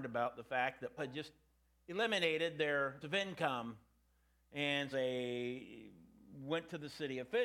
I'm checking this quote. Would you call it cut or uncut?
cut